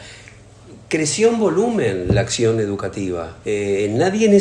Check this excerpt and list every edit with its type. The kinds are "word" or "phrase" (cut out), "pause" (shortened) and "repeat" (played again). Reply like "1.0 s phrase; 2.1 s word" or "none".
3.4 s pause